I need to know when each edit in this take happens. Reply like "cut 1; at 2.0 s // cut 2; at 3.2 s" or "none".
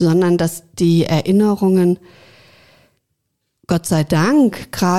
none